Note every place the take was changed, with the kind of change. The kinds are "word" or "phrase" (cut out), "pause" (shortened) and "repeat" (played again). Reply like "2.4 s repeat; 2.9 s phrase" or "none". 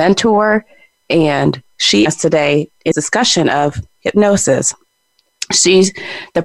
2.1 s phrase; 2.9 s word